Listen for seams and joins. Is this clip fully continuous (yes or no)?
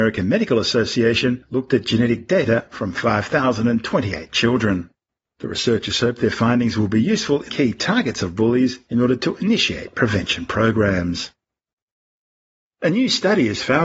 no